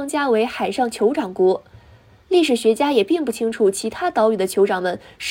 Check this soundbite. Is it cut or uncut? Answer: uncut